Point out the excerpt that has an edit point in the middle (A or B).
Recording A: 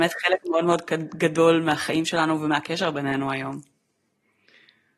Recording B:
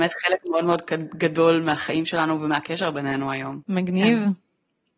B